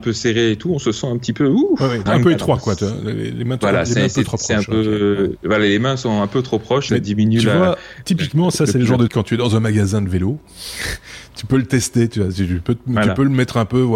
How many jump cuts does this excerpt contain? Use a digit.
3